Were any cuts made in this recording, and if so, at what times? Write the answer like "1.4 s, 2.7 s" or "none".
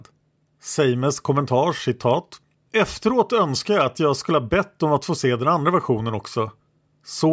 none